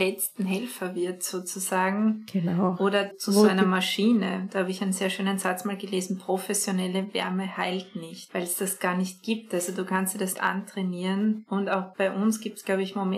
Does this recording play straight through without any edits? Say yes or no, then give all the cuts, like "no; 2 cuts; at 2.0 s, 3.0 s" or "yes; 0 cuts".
no; 2 cuts; at 3.1 s, 10.3 s